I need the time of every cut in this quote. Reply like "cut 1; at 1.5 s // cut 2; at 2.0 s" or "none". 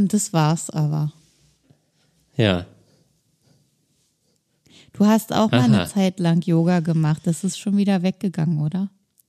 none